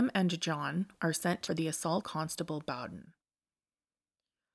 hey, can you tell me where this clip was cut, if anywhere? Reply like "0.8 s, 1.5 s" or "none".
1.5 s, 2.0 s